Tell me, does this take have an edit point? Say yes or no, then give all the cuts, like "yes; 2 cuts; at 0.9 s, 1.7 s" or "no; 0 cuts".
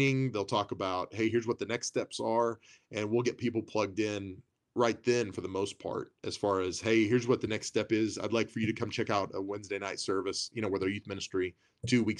no; 0 cuts